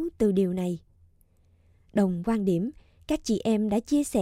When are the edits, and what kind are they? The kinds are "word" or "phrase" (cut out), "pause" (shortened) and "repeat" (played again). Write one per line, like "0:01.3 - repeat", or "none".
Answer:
none

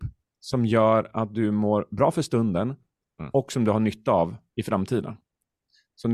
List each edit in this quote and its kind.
none

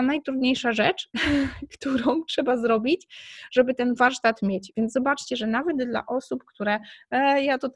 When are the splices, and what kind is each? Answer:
none

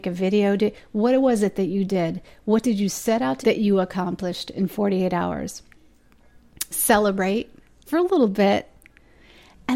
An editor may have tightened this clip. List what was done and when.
0:03.4 - word
0:06.7 - word
0:07.9 - word

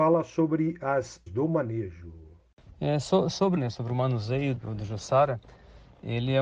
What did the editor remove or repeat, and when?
0:01.3 - word
0:03.6 - phrase
0:04.6 - word

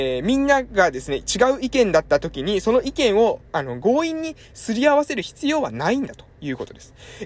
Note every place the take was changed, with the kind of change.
0:03.5 - pause

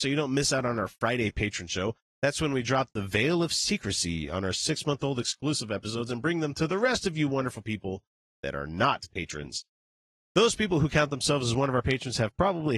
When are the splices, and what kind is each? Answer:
none

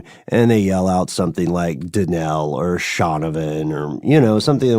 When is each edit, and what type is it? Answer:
none

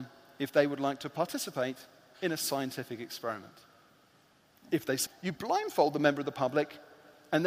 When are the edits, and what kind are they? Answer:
0:05.1 - word

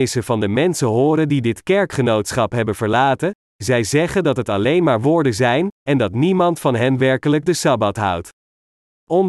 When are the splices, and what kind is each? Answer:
none

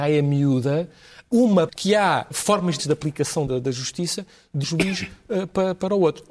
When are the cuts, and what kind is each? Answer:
0:01.7 - word
0:02.3 - word
0:02.8 - word
0:03.5 - word
0:04.6 - word

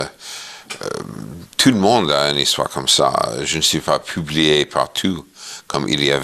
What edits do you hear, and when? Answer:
none

